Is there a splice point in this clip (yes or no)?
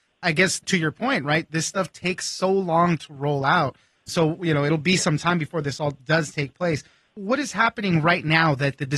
no